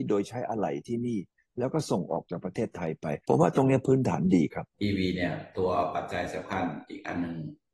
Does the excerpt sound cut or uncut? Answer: cut